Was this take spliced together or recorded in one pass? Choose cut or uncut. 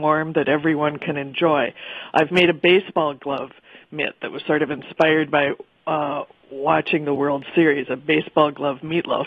uncut